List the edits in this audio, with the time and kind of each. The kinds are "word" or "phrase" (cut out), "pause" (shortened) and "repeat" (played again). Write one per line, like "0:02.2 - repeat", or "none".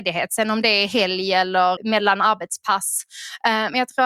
0:01.8 - word